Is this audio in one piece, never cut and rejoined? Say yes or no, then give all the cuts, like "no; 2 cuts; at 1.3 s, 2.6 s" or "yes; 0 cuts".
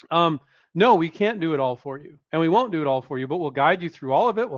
no; 1 cut; at 2.2 s